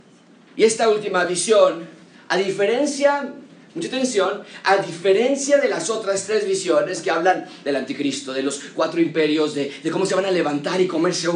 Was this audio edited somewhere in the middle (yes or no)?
no